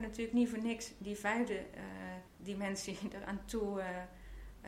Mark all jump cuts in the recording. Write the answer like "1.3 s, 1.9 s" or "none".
none